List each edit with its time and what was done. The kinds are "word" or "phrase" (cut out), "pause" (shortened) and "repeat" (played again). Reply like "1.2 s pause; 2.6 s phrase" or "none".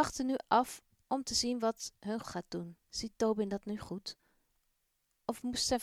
2.2 s phrase; 2.8 s pause